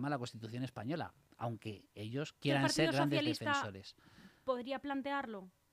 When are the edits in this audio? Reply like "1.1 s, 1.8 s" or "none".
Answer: 1.2 s, 2.4 s